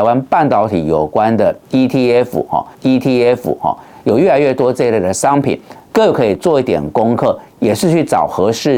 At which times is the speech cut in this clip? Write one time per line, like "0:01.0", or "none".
0:02.7